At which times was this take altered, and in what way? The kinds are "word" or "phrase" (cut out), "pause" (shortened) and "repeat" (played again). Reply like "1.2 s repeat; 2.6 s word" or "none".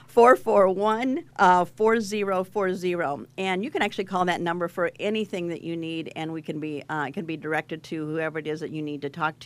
1.3 s pause